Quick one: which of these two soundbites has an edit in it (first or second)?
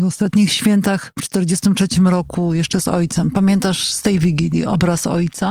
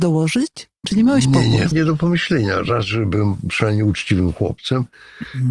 second